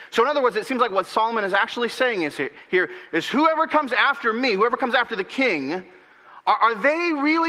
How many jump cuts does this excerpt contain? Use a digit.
0